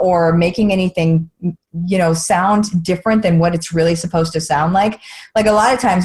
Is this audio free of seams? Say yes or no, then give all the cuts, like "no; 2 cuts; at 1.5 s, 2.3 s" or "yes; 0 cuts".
yes; 0 cuts